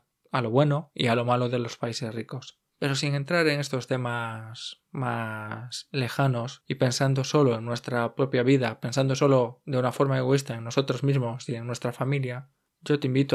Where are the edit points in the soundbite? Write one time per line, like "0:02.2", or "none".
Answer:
none